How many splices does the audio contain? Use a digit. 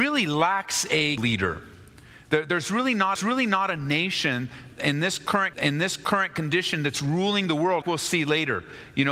4